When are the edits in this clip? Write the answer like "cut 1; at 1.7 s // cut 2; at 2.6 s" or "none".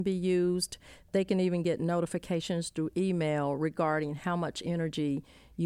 none